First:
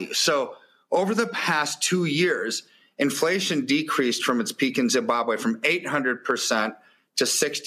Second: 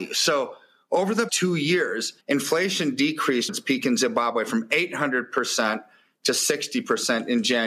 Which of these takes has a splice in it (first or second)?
second